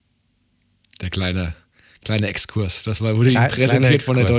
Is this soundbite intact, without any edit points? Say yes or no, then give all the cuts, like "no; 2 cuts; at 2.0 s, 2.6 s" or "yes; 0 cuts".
yes; 0 cuts